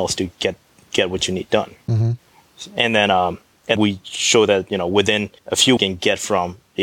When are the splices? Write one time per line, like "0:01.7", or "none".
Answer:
0:01.8
0:03.8
0:05.4
0:05.8